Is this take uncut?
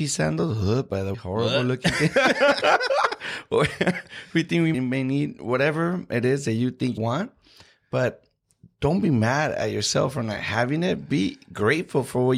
no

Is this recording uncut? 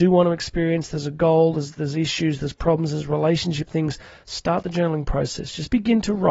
yes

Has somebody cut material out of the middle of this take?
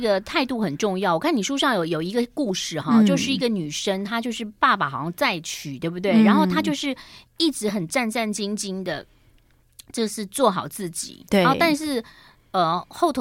no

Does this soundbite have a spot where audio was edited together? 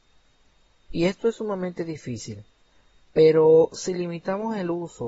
no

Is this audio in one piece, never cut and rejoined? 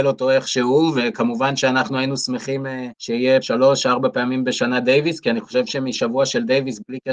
no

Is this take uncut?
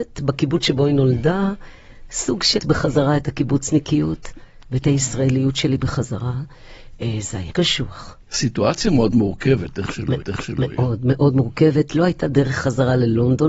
no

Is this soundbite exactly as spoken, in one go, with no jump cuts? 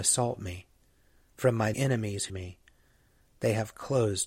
no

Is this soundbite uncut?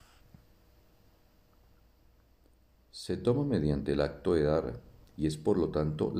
yes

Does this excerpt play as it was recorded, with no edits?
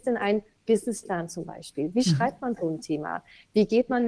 yes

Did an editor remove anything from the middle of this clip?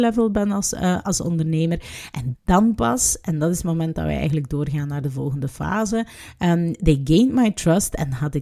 yes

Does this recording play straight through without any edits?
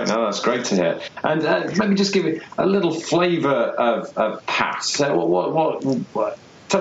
yes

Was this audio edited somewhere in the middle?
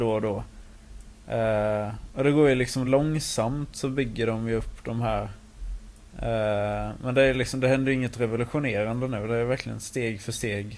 no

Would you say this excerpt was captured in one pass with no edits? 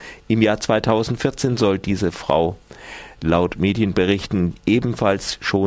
yes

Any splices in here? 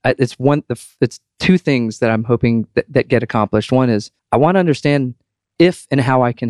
yes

